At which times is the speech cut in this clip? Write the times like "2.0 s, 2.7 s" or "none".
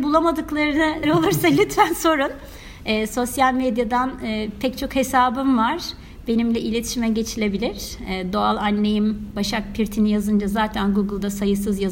1.0 s